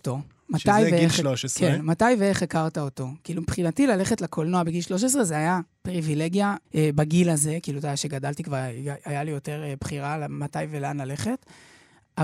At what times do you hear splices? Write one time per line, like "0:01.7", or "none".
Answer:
0:06.6